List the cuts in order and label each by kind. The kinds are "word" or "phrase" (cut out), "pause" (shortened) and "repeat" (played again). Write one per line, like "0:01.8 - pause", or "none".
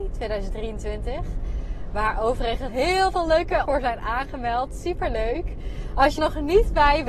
0:02.7 - word
0:03.6 - word
0:06.2 - word